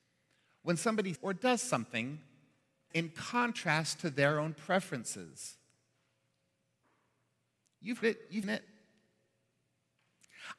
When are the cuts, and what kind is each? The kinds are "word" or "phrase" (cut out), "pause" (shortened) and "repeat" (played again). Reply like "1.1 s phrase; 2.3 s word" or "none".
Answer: 1.2 s word; 2.9 s word; 8.0 s word; 8.4 s word